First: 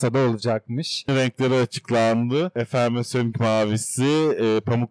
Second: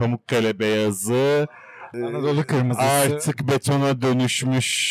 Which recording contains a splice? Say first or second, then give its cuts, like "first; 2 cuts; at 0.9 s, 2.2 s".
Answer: first; 2 cuts; at 1.1 s, 3.3 s